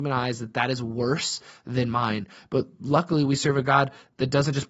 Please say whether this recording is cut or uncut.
uncut